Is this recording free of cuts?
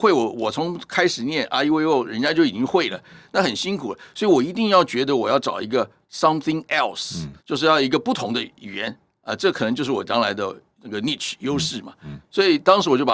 no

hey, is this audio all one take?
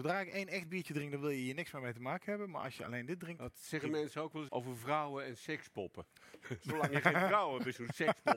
no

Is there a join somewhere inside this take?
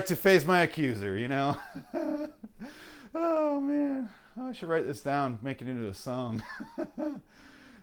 no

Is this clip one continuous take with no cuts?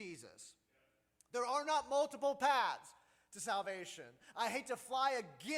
yes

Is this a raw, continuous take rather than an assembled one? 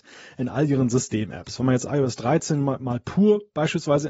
yes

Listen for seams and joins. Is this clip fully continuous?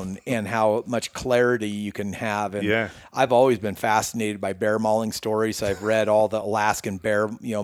yes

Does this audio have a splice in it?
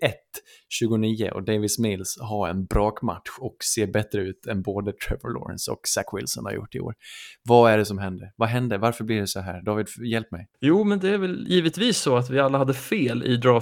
yes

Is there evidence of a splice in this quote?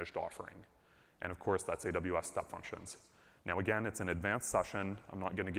no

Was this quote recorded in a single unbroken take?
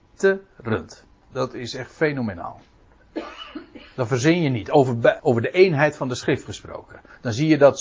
no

